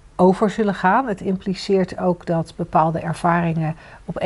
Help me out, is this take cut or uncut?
uncut